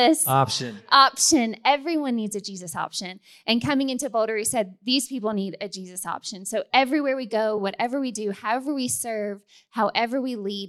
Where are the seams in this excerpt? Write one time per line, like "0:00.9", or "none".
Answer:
none